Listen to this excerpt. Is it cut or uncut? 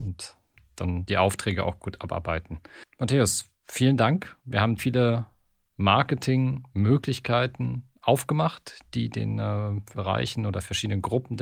cut